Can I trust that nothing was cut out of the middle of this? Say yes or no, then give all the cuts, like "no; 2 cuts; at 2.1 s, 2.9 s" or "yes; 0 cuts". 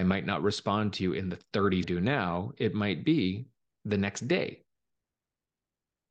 no; 1 cut; at 1.8 s